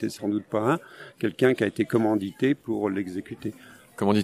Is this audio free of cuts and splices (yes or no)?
yes